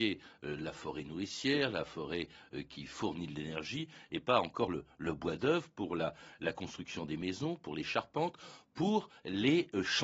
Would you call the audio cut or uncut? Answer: uncut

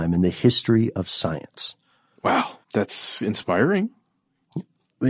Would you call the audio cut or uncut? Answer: cut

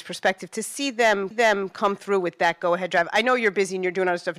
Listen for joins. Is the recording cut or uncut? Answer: cut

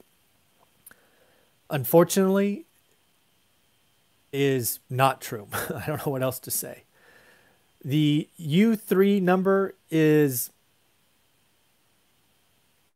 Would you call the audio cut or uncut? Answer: cut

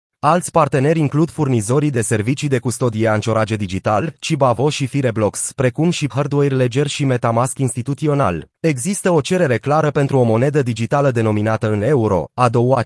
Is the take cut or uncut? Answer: cut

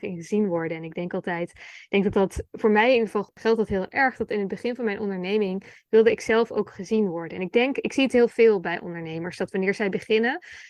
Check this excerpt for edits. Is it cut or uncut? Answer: uncut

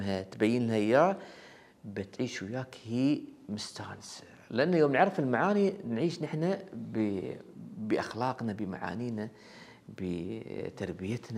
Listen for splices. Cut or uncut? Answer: uncut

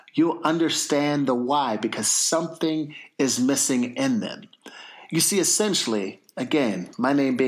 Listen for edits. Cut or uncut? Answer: uncut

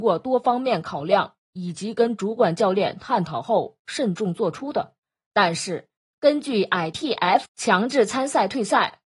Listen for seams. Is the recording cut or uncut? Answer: cut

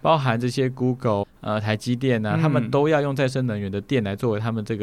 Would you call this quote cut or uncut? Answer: cut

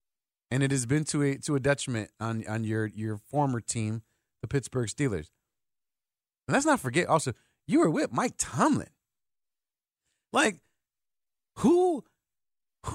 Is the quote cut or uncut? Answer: uncut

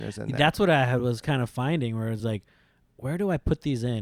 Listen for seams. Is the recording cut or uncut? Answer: uncut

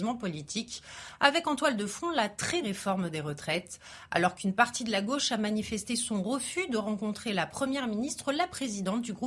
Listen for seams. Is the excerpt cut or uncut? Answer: cut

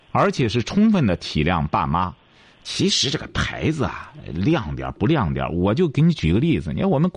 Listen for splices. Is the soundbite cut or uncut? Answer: uncut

